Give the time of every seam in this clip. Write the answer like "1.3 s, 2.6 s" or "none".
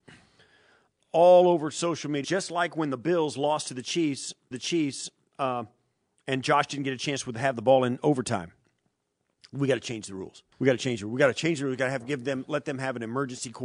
2.2 s, 4.5 s, 10.5 s